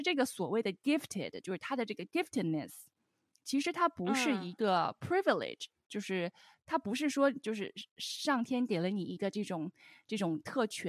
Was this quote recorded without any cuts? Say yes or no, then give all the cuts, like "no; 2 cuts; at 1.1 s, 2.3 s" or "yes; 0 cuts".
yes; 0 cuts